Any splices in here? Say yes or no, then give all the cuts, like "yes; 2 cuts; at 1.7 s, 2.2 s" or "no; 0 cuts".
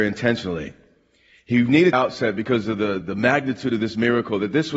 yes; 2 cuts; at 1.9 s, 3.0 s